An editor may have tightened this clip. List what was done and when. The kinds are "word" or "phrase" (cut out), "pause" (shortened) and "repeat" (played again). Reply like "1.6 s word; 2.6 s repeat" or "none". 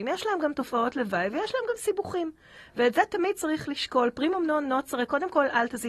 none